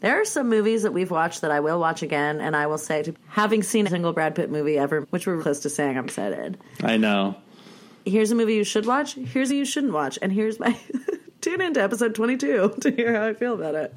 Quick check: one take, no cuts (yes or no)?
no